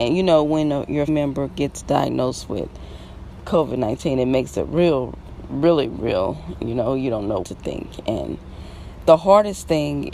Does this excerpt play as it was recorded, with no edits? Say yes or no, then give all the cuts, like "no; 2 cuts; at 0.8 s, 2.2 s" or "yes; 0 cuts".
no; 3 cuts; at 1.1 s, 5.9 s, 7.4 s